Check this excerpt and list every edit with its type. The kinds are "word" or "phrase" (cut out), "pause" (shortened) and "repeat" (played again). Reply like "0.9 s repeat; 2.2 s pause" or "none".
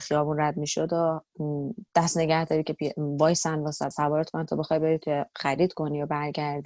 3.9 s word